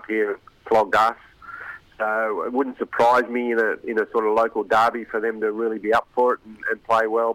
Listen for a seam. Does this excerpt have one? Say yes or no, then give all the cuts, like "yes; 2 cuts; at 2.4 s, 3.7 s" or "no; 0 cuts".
no; 0 cuts